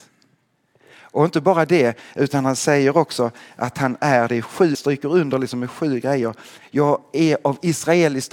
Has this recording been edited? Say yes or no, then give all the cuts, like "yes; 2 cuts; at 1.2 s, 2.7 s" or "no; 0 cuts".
yes; 1 cut; at 4.7 s